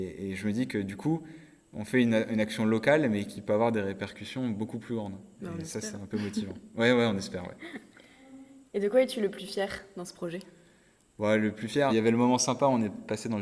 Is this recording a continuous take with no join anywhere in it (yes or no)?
no